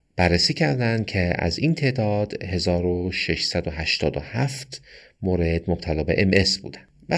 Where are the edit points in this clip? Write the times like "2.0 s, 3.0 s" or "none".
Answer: none